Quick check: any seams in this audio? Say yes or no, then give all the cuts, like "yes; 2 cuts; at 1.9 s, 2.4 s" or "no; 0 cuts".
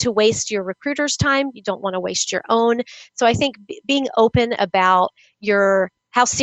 no; 0 cuts